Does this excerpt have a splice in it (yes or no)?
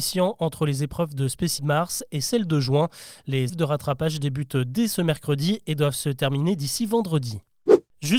yes